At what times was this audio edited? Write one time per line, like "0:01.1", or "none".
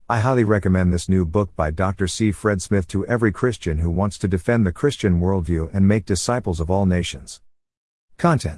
none